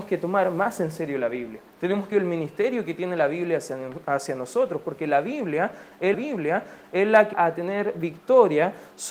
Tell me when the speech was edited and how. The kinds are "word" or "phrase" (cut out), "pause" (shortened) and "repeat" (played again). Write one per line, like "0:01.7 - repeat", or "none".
0:01.7 - pause
0:02.1 - phrase
0:06.1 - repeat
0:07.3 - phrase

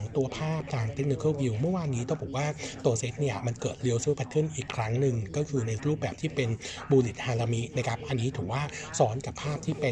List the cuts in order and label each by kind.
none

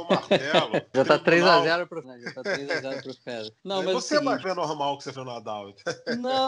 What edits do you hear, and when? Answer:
0:00.9 - word
0:02.0 - word
0:03.6 - pause
0:04.4 - word
0:05.1 - word

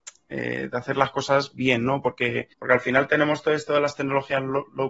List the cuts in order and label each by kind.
0:02.5 - pause

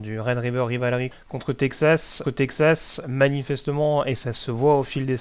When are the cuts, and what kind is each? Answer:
0:01.1 - word
0:02.2 - repeat

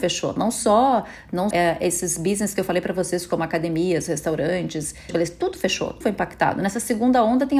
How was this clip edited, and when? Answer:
0:01.5 - word
0:05.1 - word
0:06.0 - word

